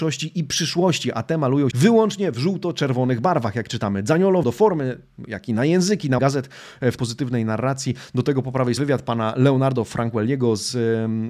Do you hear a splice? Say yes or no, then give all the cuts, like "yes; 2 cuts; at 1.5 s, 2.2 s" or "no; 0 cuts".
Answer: yes; 5 cuts; at 1.7 s, 4.4 s, 6.2 s, 7.0 s, 8.8 s